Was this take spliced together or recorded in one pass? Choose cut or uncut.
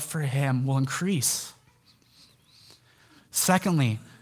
uncut